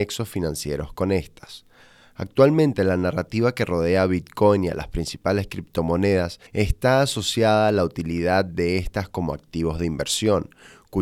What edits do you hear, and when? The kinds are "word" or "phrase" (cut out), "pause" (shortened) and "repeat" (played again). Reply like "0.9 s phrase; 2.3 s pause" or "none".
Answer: 6.5 s pause